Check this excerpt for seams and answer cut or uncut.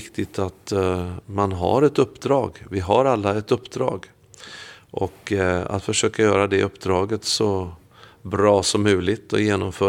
uncut